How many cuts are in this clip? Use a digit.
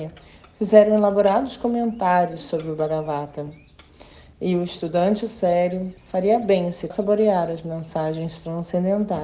2